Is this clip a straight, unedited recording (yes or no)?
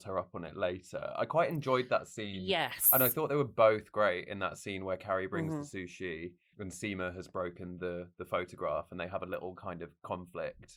no